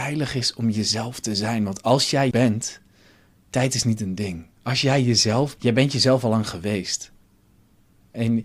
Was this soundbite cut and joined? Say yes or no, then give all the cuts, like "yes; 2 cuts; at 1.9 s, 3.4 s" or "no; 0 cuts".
yes; 3 cuts; at 2.3 s, 4.5 s, 5.6 s